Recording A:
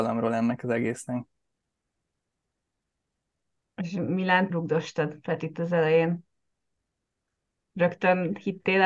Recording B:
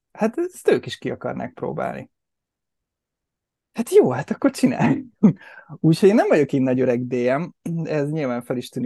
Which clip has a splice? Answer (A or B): A